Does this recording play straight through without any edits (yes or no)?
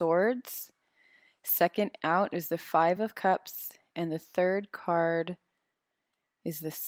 yes